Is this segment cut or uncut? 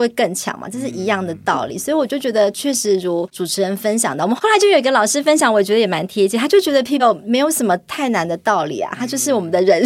cut